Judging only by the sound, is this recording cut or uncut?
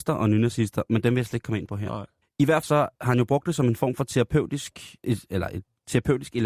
cut